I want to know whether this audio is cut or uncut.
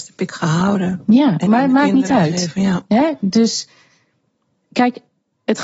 uncut